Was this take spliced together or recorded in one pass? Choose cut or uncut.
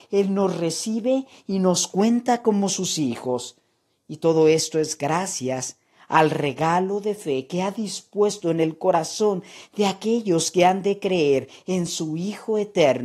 uncut